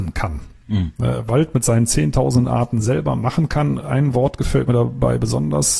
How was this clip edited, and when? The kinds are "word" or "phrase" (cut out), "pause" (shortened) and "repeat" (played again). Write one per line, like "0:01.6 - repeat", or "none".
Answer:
none

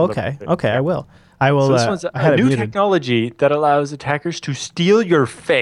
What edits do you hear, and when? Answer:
none

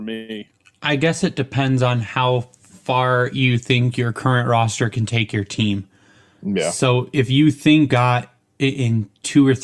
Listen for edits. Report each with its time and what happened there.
0:07.9 - word

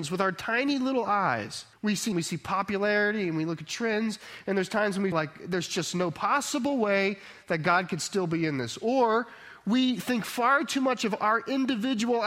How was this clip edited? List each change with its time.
0:01.7 - pause
0:02.1 - phrase
0:05.1 - word

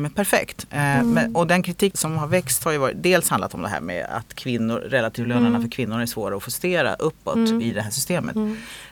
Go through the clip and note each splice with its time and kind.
0:01.9 - word

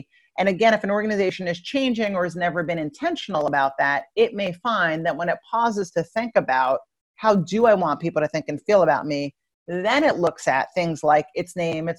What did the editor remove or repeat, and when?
none

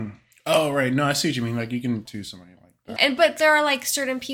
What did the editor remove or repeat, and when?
0:02.0 - word
0:03.0 - word

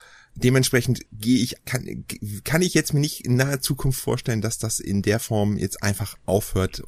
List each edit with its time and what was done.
0:01.1 - pause
0:01.6 - word

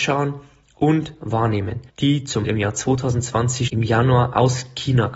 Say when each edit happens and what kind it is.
0:01.9 - pause
0:02.4 - word
0:03.7 - word

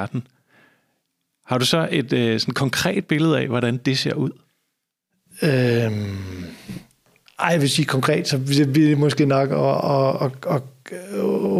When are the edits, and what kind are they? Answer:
none

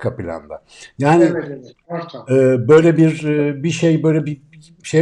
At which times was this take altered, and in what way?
none

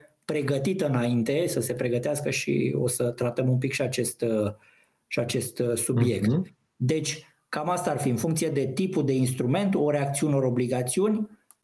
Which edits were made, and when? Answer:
none

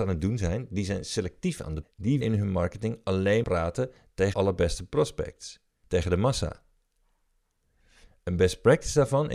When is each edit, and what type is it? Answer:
0:01.8 - word
0:02.2 - word
0:03.4 - word
0:04.3 - word
0:05.8 - word

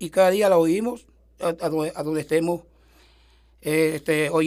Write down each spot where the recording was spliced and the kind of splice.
none

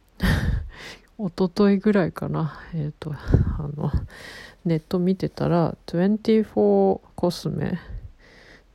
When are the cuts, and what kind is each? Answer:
0:07.1 - word

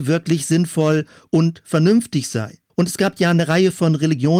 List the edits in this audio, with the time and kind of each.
0:02.7 - pause

